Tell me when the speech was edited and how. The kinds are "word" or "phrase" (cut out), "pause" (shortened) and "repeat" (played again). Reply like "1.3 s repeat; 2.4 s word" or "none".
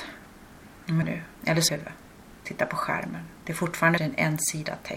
1.0 s phrase; 1.3 s pause; 1.7 s phrase; 4.0 s word

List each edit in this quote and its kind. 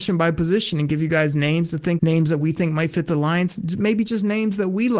2.0 s word

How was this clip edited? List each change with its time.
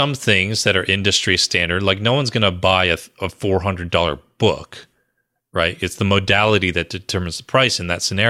none

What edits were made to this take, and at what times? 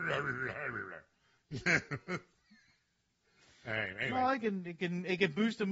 none

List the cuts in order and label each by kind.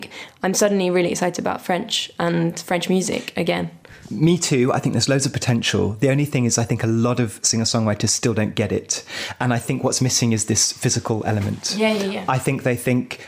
none

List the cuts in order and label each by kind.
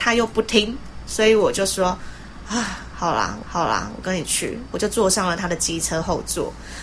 3.4 s repeat

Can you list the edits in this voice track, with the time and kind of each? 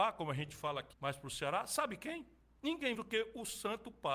0.9 s word; 2.9 s word

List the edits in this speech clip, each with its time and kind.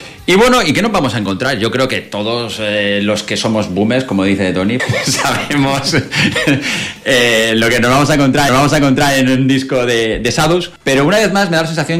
4.8 s word; 8.5 s repeat; 10.8 s pause

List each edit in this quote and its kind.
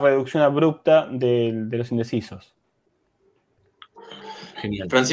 none

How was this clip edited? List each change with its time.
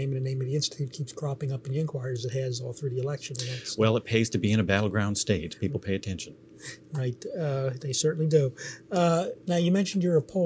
none

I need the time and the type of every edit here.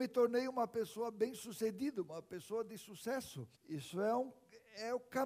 3.5 s pause

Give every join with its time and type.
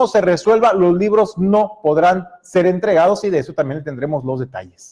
none

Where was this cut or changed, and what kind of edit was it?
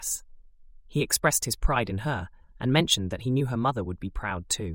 none

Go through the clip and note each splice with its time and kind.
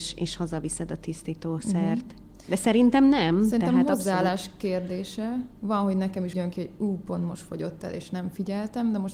6.3 s word

